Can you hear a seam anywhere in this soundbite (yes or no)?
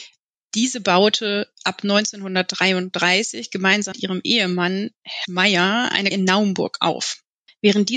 yes